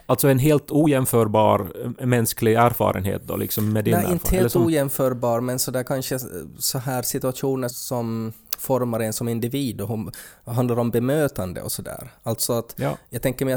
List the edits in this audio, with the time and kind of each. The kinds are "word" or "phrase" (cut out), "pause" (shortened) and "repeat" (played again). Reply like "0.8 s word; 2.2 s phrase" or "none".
7.7 s word

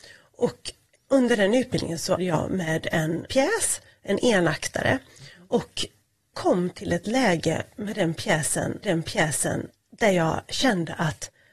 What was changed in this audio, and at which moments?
1.0 s word; 2.2 s word; 3.3 s word; 6.3 s word; 8.8 s repeat

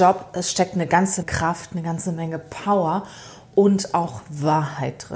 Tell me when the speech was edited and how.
1.2 s word

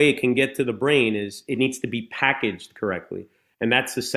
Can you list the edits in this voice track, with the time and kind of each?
none

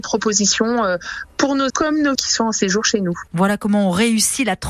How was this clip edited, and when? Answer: 1.7 s word; 2.1 s word

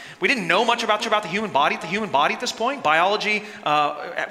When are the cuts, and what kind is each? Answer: 1.0 s repeat; 1.8 s repeat

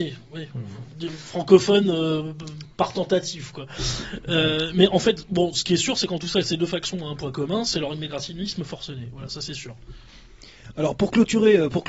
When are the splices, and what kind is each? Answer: 2.7 s pause

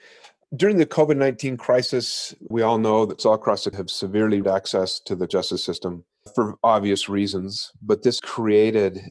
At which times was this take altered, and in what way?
2.5 s word; 3.2 s word; 3.7 s word; 4.4 s word; 5.3 s word; 6.3 s word; 8.2 s word

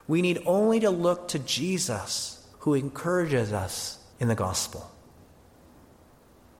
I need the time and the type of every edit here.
2.5 s pause; 4.1 s pause

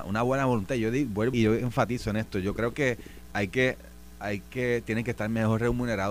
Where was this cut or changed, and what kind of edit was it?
1.3 s word

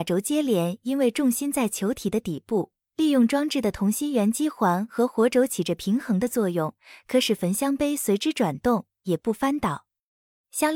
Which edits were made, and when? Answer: none

